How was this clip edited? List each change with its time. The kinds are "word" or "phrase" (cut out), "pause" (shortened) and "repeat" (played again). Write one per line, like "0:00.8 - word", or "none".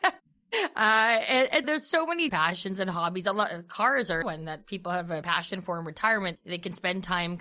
0:01.6 - word
0:02.3 - word
0:04.2 - word
0:05.2 - word